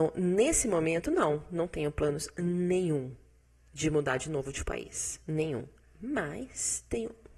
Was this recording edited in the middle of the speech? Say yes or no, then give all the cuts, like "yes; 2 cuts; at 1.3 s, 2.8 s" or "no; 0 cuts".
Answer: no; 0 cuts